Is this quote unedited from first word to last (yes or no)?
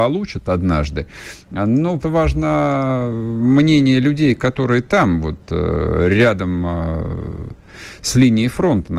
no